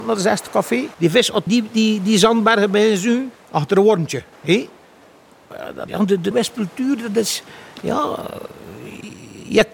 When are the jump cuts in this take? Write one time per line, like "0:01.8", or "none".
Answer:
0:00.9
0:01.5
0:03.3
0:04.3
0:05.9
0:06.3